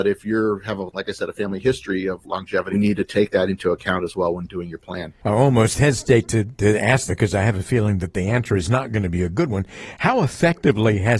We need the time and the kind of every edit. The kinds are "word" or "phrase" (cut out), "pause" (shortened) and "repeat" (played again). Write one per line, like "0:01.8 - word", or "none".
0:02.7 - phrase
0:07.1 - phrase